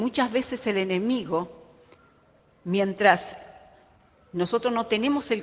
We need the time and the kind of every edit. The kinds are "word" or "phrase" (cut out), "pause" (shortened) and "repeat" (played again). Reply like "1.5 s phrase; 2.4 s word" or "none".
none